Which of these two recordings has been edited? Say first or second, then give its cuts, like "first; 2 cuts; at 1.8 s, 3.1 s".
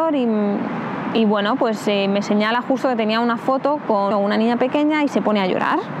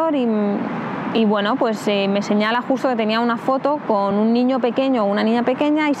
first; 1 cut; at 4.1 s